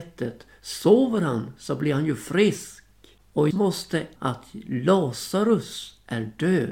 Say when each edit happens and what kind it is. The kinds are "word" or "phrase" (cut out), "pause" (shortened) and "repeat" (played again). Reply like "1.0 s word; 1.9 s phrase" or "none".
3.5 s word; 4.2 s phrase